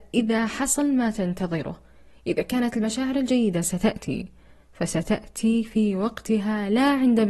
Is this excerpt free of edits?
yes; 0 cuts

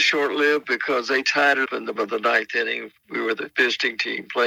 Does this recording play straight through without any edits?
no; 2 cuts; at 1.7 s, 2.0 s

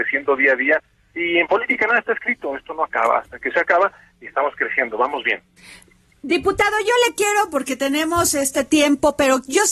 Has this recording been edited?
no; 0 cuts

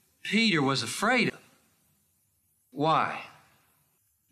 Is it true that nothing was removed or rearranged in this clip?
no; 1 cut; at 1.3 s

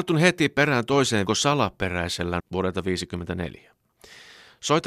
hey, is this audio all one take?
no; 2 cuts; at 1.3 s, 2.4 s

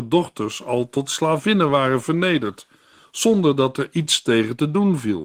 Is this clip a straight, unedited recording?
yes; 0 cuts

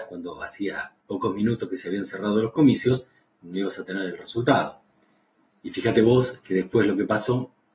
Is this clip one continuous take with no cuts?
no; 1 cut; at 1.0 s

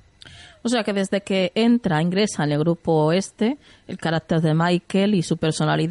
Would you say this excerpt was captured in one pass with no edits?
yes; 0 cuts

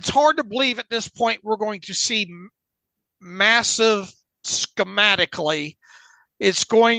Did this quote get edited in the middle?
yes; 1 cut; at 4.4 s

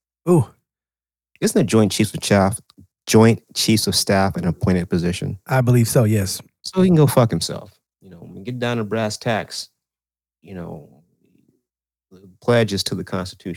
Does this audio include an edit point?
no; 0 cuts

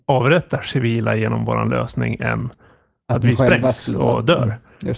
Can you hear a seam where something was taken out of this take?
no; 0 cuts

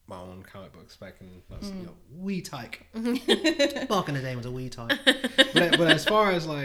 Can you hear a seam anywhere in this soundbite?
no; 0 cuts

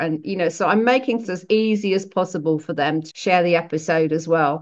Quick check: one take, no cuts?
no; 2 cuts; at 1.2 s, 3.1 s

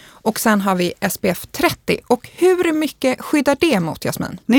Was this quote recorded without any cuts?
yes; 0 cuts

